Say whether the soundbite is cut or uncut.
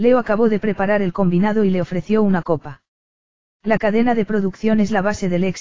uncut